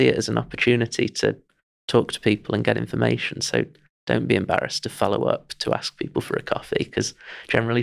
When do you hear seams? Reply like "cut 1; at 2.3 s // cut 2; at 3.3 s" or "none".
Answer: none